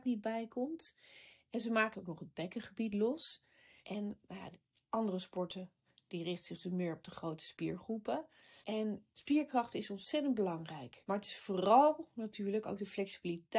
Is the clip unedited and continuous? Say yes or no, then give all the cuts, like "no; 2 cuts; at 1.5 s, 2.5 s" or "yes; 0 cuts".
no; 1 cut; at 1.9 s